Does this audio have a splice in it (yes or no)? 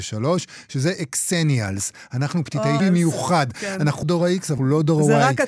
yes